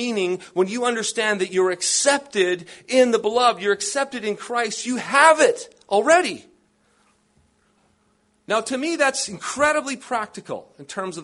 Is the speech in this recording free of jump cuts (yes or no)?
yes